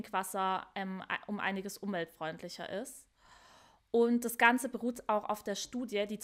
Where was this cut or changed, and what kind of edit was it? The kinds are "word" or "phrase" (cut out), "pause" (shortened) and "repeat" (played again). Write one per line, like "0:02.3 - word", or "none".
none